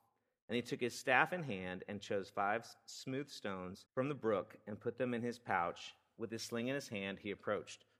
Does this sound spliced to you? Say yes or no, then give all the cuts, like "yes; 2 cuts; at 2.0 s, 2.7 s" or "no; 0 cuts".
yes; 1 cut; at 3.9 s